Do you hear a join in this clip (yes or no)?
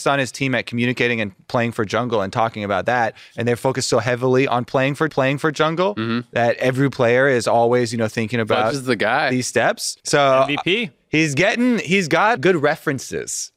yes